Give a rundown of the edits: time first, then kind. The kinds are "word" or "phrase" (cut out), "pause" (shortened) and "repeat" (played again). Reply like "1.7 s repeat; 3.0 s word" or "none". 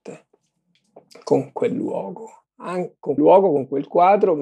3.2 s word